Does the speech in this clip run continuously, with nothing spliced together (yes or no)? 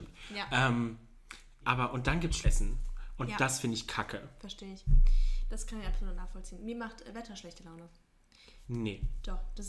no